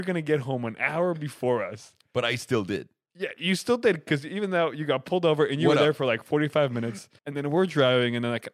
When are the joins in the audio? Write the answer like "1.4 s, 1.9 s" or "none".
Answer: 7.2 s